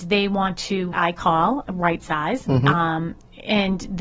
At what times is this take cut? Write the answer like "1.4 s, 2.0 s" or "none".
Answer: 0.9 s